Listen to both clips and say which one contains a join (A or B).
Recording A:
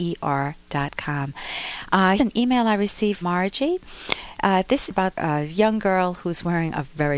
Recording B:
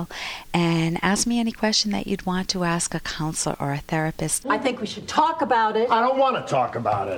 A